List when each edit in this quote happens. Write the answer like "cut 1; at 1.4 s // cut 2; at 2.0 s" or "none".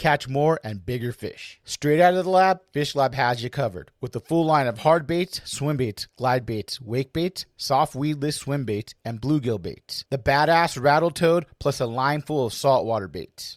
none